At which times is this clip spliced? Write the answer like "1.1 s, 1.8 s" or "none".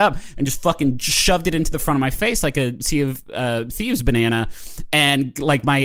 none